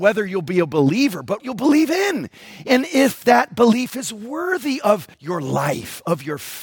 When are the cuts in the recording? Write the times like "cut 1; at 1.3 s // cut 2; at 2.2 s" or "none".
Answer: cut 1; at 1.4 s // cut 2; at 5.1 s

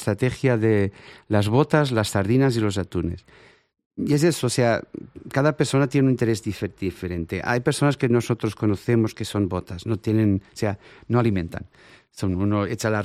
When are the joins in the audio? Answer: none

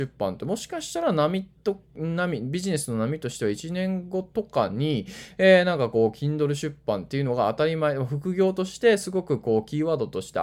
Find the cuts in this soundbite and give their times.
none

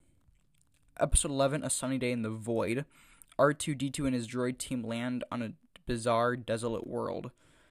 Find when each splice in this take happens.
none

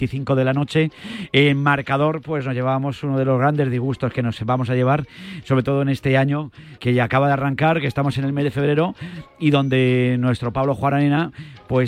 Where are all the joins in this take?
cut 1; at 6.8 s

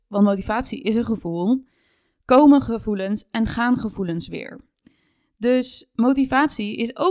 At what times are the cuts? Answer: none

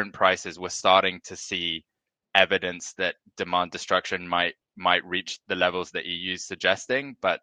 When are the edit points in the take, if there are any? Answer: none

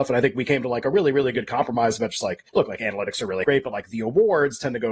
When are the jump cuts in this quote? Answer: cut 1; at 2.5 s // cut 2; at 3.4 s

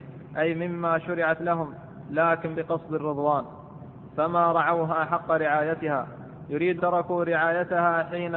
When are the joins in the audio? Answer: cut 1; at 2.5 s // cut 2; at 6.8 s

